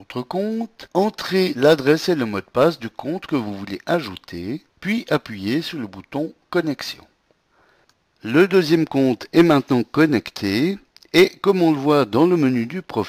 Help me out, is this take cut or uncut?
uncut